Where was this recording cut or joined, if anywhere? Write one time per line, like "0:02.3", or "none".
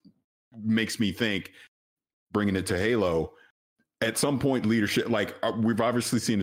none

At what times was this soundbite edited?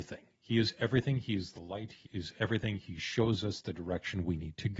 0:02.0

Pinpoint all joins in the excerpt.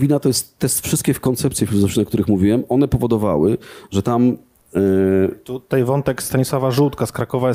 none

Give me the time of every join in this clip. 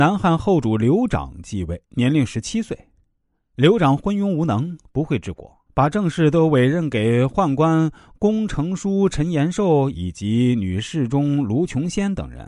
0:01.8
0:05.7

